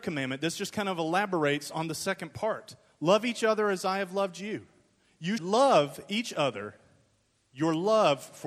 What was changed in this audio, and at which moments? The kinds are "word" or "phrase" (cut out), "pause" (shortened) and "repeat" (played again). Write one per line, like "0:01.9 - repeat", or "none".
0:05.4 - word